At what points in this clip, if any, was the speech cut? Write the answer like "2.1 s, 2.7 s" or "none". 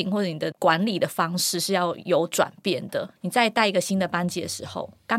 3.2 s